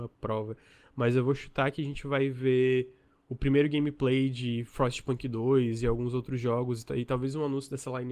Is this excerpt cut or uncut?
uncut